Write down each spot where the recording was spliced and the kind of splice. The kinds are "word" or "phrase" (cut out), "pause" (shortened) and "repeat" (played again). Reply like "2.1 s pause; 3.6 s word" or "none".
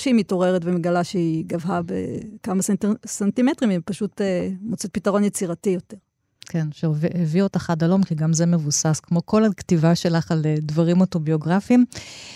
none

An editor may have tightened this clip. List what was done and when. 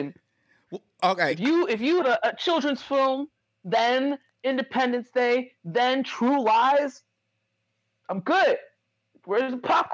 1.0 s word; 2.0 s word

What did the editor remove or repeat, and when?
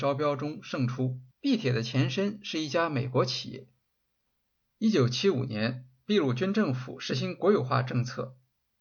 1.3 s pause

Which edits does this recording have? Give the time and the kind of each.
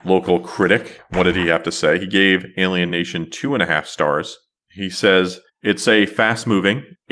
none

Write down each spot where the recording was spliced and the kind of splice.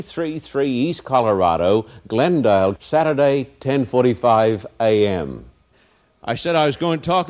2.7 s word

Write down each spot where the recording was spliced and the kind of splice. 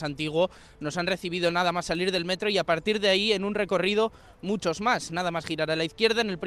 none

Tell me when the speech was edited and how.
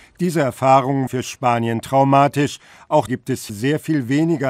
1.1 s word; 3.1 s word; 3.5 s word

